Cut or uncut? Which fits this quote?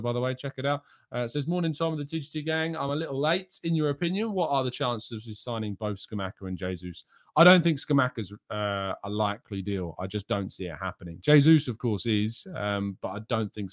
uncut